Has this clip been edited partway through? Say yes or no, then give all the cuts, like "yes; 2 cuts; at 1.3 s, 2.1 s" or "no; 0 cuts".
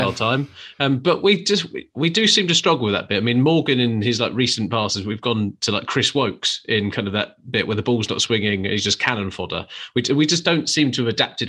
no; 0 cuts